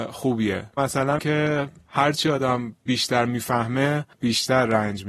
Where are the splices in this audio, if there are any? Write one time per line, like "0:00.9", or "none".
0:01.2
0:04.1